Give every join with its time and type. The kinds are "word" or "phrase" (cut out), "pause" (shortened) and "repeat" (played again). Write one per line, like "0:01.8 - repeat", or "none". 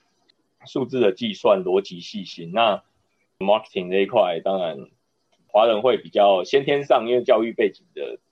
none